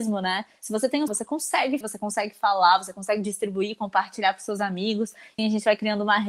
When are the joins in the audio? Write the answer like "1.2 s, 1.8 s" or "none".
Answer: 1.1 s, 1.8 s, 5.4 s